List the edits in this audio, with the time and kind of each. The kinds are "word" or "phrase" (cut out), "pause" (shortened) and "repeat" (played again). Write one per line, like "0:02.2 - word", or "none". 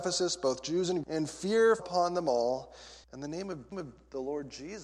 0:01.0 - word
0:01.8 - word
0:03.0 - pause
0:03.7 - repeat